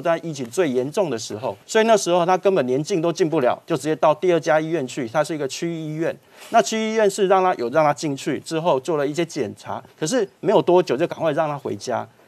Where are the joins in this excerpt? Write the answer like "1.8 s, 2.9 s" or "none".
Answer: 1.6 s, 9.9 s